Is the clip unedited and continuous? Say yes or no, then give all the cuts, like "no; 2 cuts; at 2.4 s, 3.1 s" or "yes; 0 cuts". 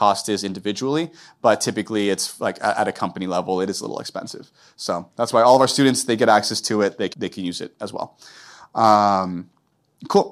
no; 1 cut; at 7.1 s